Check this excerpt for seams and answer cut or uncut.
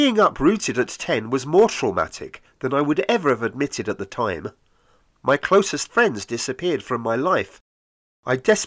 uncut